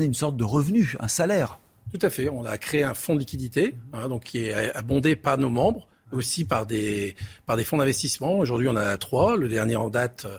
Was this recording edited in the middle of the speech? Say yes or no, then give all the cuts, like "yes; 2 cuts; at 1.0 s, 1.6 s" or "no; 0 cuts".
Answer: no; 0 cuts